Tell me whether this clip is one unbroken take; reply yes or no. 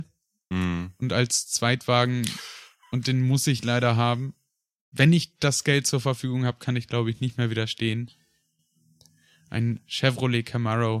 yes